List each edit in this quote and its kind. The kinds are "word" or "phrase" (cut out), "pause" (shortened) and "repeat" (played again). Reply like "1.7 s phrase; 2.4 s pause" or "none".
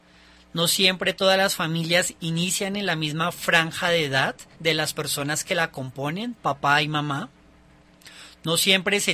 4.5 s pause